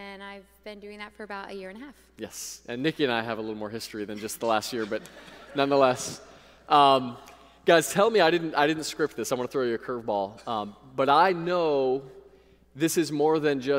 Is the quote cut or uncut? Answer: uncut